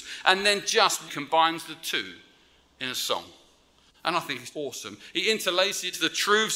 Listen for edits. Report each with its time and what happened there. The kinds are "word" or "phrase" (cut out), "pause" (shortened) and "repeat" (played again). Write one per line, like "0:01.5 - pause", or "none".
0:01.1 - word
0:04.5 - word